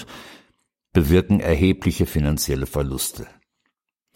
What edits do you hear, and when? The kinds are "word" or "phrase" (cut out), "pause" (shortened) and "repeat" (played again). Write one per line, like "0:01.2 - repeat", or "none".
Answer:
none